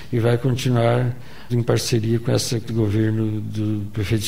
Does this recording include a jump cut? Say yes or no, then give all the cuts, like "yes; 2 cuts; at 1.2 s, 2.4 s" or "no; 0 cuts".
yes; 2 cuts; at 1.5 s, 2.7 s